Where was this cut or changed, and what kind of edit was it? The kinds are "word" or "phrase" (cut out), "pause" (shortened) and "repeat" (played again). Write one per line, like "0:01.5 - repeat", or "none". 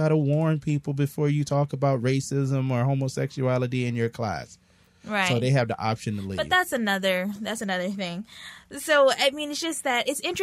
none